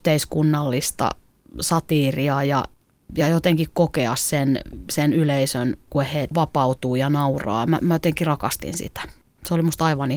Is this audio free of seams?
yes; 0 cuts

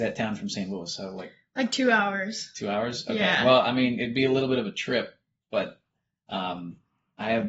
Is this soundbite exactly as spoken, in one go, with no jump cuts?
yes; 0 cuts

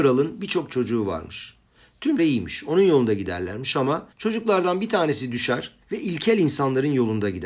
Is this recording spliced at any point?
yes; 3 cuts; at 2.2 s, 4.1 s, 5.8 s

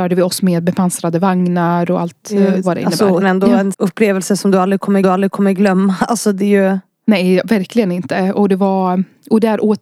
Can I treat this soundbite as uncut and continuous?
no; 4 cuts; at 1.9 s, 3.2 s, 3.7 s, 5.0 s

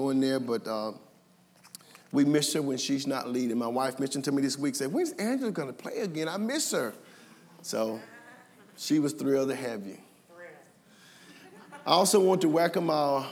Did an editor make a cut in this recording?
no; 0 cuts

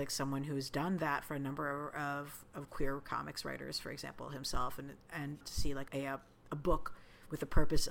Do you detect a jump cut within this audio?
yes; 2 cuts; at 5.4 s, 5.9 s

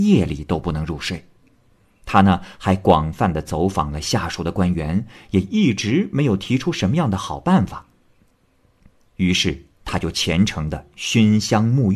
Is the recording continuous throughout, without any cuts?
yes; 0 cuts

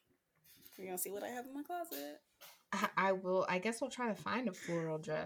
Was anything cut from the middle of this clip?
no; 0 cuts

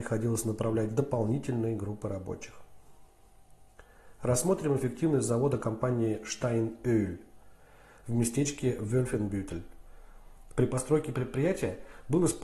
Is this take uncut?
yes; 0 cuts

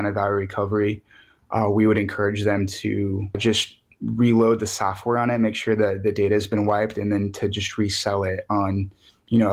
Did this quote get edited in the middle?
no; 0 cuts

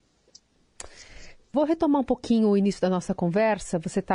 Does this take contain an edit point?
no; 0 cuts

